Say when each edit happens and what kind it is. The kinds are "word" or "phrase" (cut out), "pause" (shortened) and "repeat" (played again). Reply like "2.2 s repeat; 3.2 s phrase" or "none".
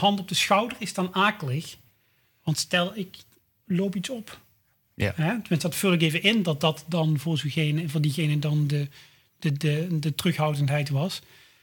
none